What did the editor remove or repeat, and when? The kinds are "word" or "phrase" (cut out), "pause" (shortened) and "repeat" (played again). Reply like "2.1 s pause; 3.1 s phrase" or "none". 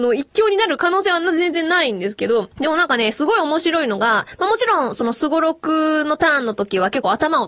2.5 s pause